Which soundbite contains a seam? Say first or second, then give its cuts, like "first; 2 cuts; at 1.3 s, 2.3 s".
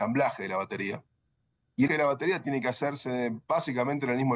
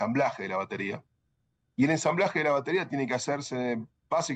first; 2 cuts; at 1.9 s, 3.4 s